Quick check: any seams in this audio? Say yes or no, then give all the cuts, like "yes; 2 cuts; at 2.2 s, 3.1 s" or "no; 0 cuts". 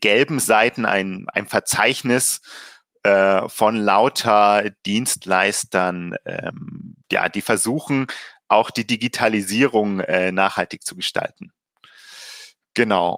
yes; 1 cut; at 7.0 s